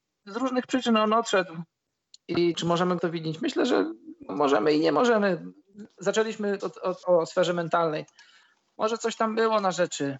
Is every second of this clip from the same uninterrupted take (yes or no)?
no